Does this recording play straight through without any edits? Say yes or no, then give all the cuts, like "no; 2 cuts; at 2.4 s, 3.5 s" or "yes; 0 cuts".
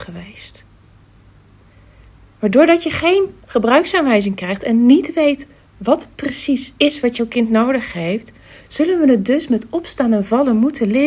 yes; 0 cuts